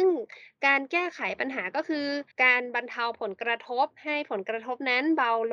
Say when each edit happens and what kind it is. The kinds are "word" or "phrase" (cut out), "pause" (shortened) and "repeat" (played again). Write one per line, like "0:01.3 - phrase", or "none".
0:02.3 - pause